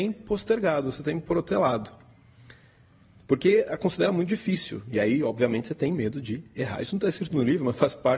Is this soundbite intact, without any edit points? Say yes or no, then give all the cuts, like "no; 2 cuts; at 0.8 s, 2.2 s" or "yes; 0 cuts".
yes; 0 cuts